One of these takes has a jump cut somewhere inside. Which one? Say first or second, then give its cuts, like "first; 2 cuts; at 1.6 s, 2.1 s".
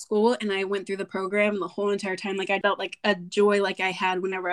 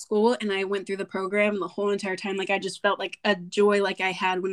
first; 1 cut; at 2.6 s